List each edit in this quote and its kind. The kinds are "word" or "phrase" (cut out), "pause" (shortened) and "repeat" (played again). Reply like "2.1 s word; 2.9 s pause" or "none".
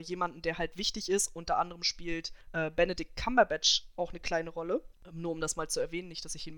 2.4 s pause